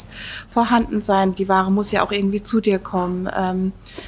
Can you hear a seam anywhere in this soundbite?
no; 0 cuts

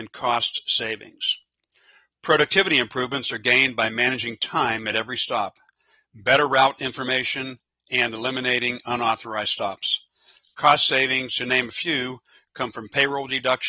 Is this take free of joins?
yes; 0 cuts

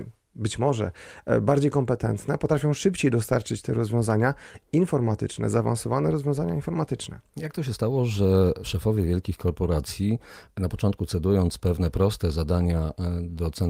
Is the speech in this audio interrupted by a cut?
no; 0 cuts

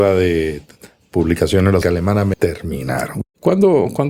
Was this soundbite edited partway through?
yes; 2 cuts; at 1.8 s, 2.3 s

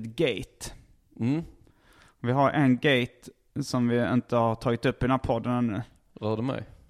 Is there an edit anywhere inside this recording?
no; 0 cuts

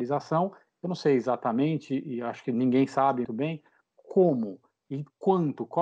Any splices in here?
yes; 1 cut; at 3.2 s

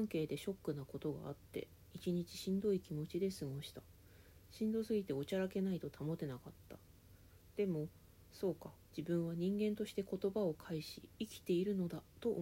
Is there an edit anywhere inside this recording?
yes; 1 cut; at 8.8 s

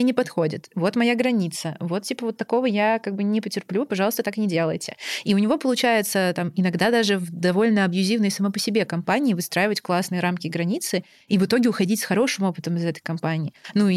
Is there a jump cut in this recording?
no; 0 cuts

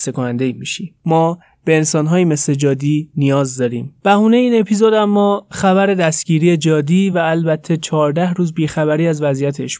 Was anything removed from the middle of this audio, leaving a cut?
no; 0 cuts

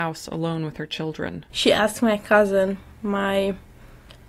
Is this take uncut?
no; 1 cut; at 1.5 s

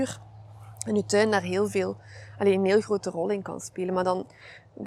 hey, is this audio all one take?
yes; 0 cuts

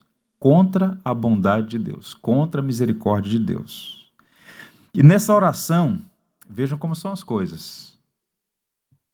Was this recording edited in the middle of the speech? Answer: no; 0 cuts

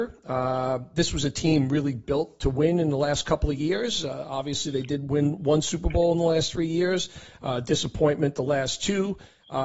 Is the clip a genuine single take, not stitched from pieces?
yes; 0 cuts

